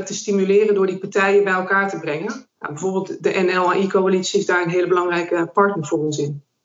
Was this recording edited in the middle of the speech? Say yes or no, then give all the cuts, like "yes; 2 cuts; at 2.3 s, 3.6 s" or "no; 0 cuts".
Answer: no; 0 cuts